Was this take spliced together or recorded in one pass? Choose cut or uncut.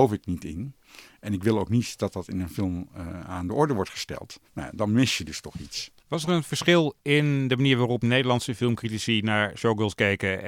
cut